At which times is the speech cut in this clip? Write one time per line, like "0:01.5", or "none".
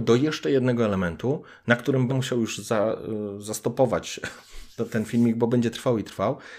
0:02.1
0:04.8